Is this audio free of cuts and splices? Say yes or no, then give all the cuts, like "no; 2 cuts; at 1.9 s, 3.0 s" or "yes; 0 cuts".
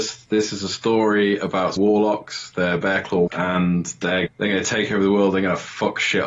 no; 3 cuts; at 1.8 s, 3.3 s, 4.3 s